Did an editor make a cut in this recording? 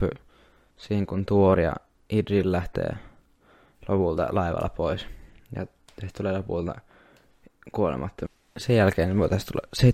no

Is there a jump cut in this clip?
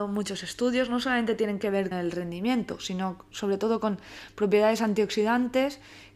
yes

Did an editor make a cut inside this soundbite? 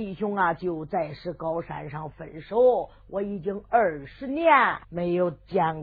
yes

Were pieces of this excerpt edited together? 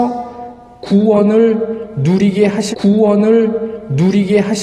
yes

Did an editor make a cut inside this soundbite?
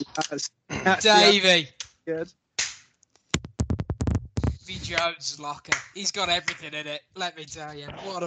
no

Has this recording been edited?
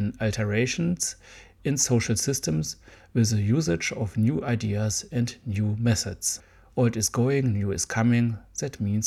no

